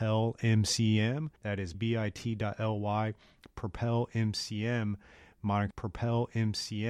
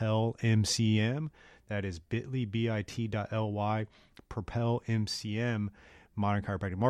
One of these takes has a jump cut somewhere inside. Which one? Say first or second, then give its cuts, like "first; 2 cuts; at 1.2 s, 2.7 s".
first; 3 cuts; at 1.4 s, 1.7 s, 5.7 s